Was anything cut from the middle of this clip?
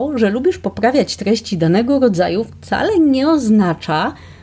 no; 0 cuts

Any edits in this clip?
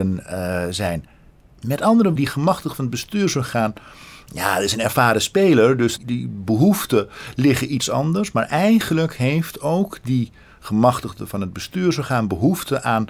yes; 2 cuts; at 2.2 s, 6.0 s

